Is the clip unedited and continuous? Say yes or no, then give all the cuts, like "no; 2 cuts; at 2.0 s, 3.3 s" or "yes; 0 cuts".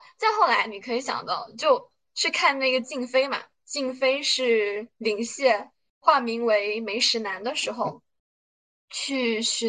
yes; 0 cuts